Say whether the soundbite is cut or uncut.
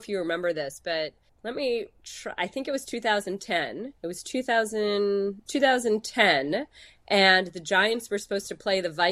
cut